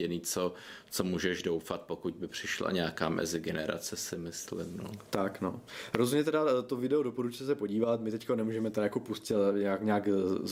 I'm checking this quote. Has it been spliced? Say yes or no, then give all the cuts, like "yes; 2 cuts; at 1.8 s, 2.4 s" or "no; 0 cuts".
no; 0 cuts